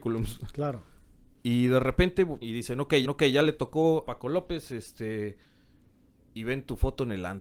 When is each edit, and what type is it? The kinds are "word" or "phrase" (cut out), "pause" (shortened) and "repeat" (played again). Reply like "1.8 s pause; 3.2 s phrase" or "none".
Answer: 2.4 s word; 3.0 s repeat; 4.1 s word

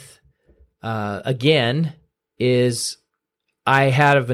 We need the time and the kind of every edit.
none

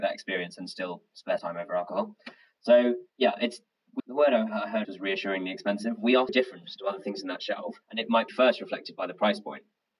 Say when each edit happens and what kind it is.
1.4 s phrase; 3.1 s pause; 4.0 s phrase; 4.8 s word; 6.3 s word; 7.8 s pause; 8.3 s phrase

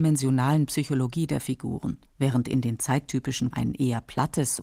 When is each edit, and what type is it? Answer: 2.1 s pause; 3.5 s word

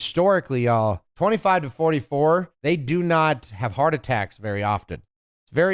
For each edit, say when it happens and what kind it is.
1.1 s pause; 2.5 s pause

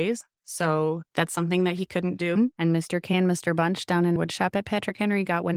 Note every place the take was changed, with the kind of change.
1.1 s pause; 4.2 s word

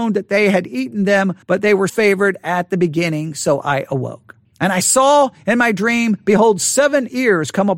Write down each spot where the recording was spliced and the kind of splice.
1.4 s pause; 1.9 s word; 4.4 s pause

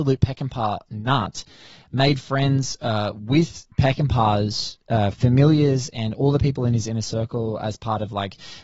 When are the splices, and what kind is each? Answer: 3.7 s pause

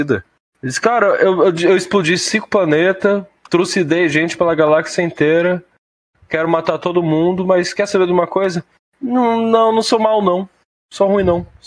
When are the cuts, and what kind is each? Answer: none

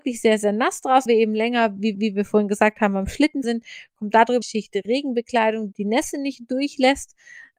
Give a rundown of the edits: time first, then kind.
1.1 s phrase; 1.9 s repeat; 3.4 s word; 4.4 s phrase; 5.7 s word

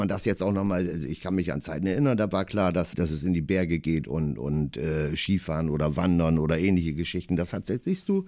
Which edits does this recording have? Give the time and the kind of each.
2.9 s word

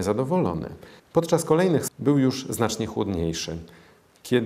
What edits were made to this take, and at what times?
1.0 s pause; 1.9 s word

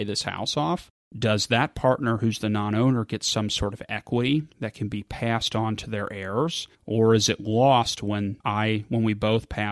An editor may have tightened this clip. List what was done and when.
4.5 s pause; 6.7 s pause; 8.4 s pause

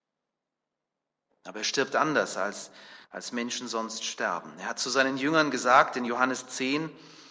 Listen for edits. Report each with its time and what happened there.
3.0 s pause

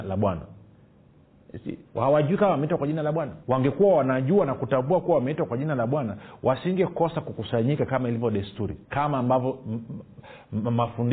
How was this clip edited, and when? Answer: 1.8 s pause; 3.4 s pause; 8.8 s pause

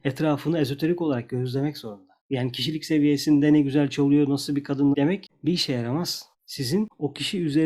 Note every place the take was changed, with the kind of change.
2.2 s pause; 4.9 s phrase; 6.3 s pause

